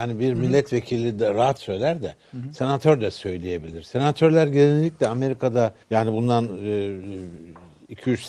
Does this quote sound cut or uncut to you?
cut